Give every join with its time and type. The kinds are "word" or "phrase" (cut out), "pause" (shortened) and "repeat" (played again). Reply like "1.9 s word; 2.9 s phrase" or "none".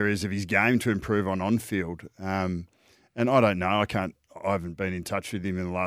none

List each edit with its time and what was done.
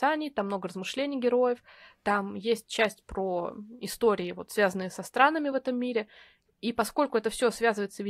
none

